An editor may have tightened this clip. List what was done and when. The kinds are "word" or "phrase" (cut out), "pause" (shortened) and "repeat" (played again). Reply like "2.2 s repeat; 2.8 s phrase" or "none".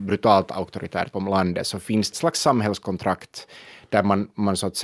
1.1 s word; 2.1 s phrase